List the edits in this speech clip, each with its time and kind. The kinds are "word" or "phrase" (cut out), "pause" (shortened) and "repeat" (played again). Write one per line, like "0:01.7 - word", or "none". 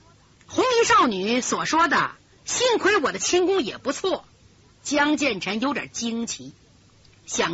none